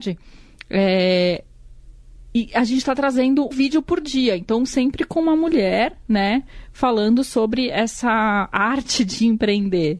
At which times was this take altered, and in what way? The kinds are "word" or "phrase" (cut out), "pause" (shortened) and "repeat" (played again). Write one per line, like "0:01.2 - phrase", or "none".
0:03.5 - word